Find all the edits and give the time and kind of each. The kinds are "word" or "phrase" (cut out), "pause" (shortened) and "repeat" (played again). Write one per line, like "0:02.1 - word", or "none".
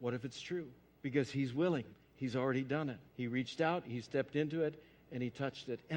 0:00.9 - pause
0:01.9 - pause
0:03.1 - pause